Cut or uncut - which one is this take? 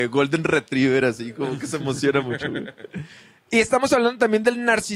uncut